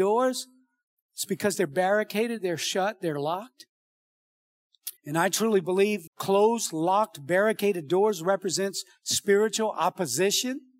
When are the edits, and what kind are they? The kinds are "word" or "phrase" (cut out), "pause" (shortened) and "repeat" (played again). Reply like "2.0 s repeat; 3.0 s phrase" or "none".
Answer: 5.0 s pause; 6.1 s pause